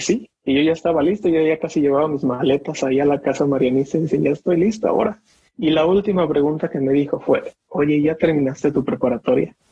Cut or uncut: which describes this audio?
uncut